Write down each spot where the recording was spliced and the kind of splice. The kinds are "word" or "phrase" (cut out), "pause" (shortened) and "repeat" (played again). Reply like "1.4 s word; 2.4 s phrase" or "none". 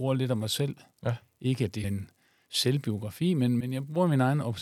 1.8 s word; 3.6 s word